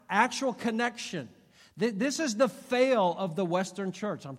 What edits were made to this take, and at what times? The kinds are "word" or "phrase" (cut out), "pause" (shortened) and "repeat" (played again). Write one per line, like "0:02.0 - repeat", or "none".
none